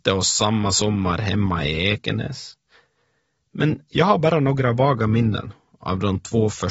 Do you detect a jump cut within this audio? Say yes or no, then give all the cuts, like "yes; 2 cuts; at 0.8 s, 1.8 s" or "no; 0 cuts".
no; 0 cuts